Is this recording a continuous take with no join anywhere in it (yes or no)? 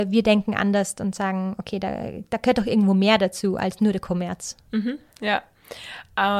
yes